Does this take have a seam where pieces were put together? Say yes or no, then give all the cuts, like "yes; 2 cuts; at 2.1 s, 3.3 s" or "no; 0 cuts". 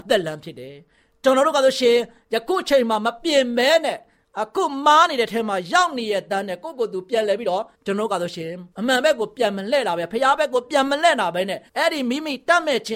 yes; 3 cuts; at 7.7 s, 8.7 s, 11.7 s